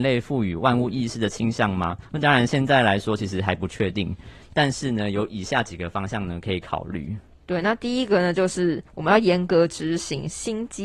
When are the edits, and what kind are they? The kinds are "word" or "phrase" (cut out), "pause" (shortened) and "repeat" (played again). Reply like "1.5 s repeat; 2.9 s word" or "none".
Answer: 2.0 s pause; 8.9 s pause